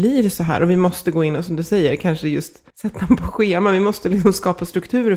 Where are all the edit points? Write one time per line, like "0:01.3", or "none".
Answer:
0:02.7